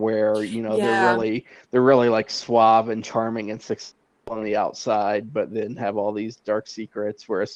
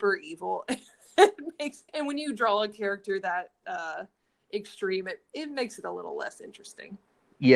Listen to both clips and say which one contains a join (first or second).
second